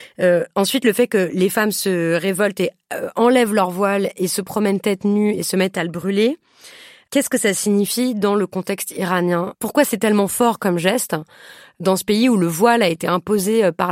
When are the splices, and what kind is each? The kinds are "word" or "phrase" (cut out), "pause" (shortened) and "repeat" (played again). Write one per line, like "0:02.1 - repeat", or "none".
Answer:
none